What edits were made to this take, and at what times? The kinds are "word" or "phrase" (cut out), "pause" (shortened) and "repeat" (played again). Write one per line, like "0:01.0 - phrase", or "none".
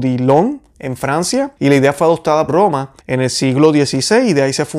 0:01.6 - pause
0:02.5 - word
0:03.0 - pause